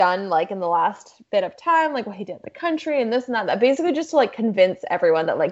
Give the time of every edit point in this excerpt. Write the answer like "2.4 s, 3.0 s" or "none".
none